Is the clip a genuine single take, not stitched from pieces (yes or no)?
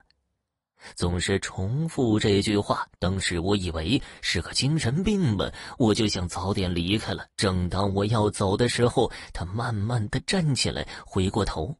no